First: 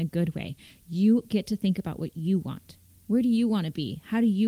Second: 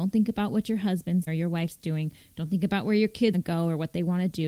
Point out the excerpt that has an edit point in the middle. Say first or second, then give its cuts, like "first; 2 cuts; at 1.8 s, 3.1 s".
second; 2 cuts; at 1.3 s, 3.3 s